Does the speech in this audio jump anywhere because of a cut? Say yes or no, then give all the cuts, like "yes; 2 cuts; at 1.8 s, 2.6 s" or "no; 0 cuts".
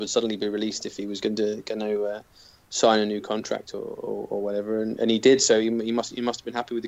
no; 0 cuts